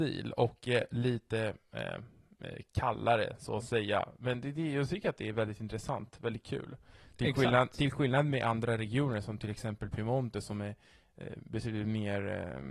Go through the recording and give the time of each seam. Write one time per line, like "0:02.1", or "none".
none